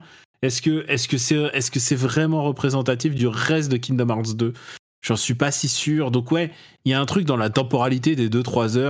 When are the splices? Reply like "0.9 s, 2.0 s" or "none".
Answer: none